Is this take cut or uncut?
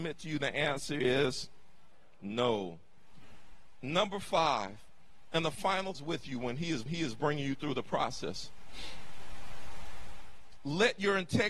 cut